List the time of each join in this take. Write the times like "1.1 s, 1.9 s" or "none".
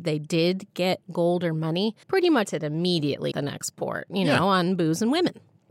1.0 s, 2.0 s, 2.4 s, 3.3 s